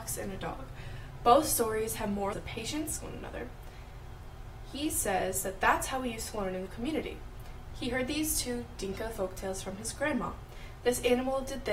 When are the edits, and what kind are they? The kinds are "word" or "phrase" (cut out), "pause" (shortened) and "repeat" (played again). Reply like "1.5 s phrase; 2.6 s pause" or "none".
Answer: 2.3 s word; 3.0 s phrase; 6.7 s word

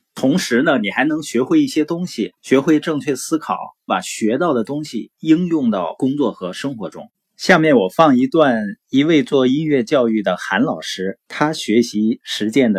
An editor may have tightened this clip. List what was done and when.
2.4 s pause; 3.9 s phrase; 11.3 s pause

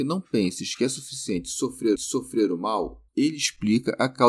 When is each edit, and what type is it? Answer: 2.0 s repeat; 3.1 s pause

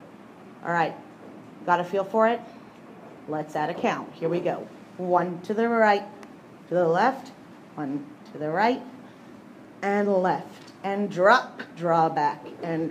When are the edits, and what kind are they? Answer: 6.7 s word

